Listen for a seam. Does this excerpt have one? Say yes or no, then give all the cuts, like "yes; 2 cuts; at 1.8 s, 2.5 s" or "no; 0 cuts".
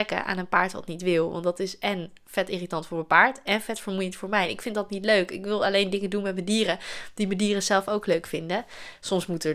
no; 0 cuts